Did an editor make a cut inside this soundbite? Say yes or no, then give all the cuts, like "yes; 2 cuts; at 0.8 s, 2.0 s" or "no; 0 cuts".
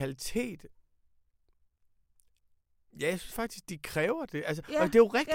no; 0 cuts